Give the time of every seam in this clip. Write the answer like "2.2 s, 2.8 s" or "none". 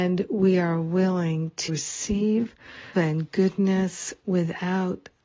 1.7 s, 2.9 s